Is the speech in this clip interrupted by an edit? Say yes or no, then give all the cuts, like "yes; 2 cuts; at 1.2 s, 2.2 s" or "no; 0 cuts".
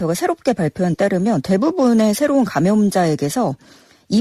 yes; 1 cut; at 0.9 s